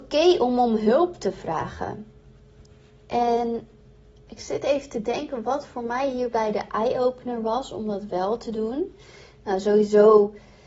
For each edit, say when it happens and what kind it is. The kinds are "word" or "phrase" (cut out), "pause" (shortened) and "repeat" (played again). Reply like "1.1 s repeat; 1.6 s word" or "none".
none